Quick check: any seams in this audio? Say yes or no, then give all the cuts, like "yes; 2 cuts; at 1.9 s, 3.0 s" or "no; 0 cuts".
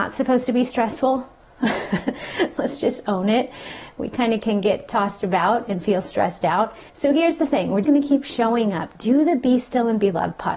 yes; 2 cuts; at 6.9 s, 7.8 s